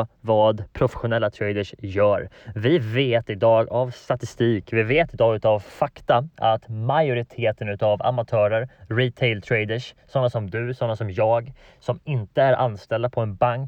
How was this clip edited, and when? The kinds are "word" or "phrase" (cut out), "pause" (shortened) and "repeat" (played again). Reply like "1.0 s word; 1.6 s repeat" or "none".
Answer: none